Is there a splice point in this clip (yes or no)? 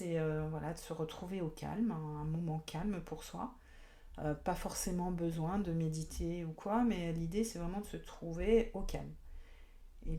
no